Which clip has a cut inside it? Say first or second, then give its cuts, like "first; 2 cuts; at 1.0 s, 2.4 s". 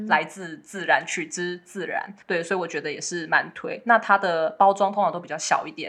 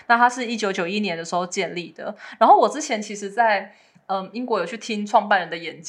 first; 1 cut; at 2.2 s